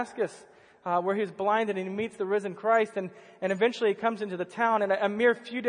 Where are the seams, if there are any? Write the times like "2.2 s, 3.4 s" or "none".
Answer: none